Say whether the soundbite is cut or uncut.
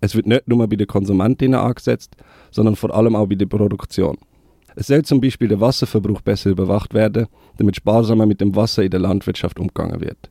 uncut